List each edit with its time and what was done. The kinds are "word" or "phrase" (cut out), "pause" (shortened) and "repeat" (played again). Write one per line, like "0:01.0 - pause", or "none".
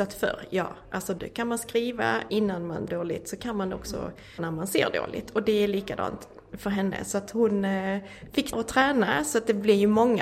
0:01.2 - word
0:02.3 - word
0:02.9 - word
0:04.4 - word
0:08.5 - word